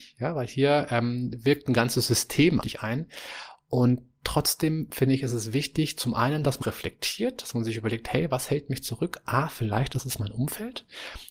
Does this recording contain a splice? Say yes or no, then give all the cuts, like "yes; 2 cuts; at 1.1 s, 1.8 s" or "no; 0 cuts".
yes; 2 cuts; at 2.6 s, 6.6 s